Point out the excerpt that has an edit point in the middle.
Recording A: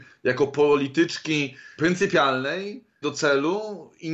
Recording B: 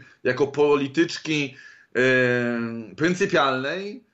A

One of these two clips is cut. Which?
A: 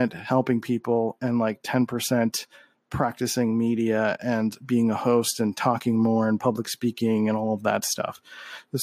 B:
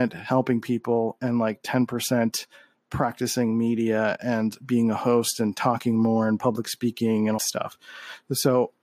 B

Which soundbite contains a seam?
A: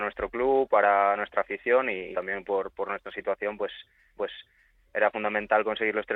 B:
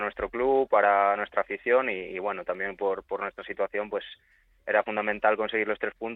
A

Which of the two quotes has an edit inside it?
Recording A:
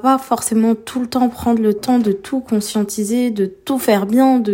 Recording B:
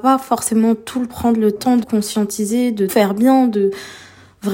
B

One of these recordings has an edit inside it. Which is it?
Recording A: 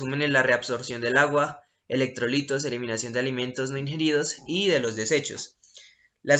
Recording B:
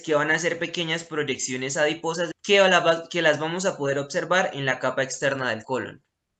B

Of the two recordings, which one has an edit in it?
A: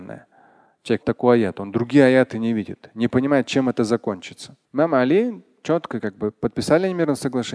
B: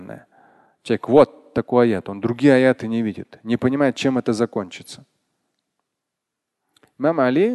A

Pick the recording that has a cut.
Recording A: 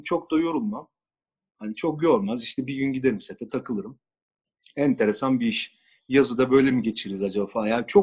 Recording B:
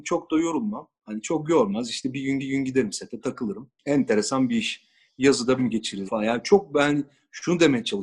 B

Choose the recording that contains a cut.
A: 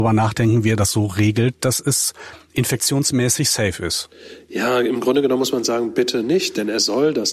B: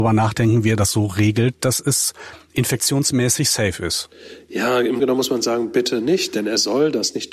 B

